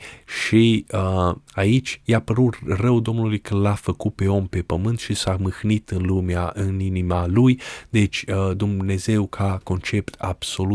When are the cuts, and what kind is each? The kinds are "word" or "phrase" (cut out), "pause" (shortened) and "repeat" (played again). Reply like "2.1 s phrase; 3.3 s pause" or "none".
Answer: 1.5 s pause